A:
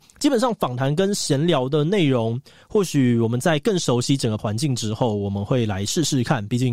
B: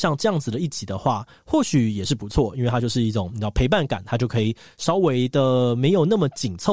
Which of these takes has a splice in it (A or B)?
A